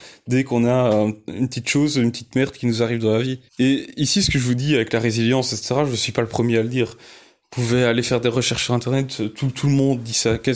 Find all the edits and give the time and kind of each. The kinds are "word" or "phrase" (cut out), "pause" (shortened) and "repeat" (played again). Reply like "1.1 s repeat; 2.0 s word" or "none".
3.5 s pause